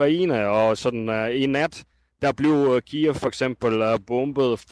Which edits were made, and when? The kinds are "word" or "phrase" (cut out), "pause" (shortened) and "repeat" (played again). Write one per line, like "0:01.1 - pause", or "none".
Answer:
none